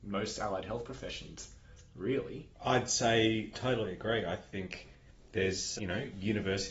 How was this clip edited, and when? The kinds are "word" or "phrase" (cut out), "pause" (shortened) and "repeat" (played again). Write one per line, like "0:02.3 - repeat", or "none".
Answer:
0:03.5 - word
0:05.8 - word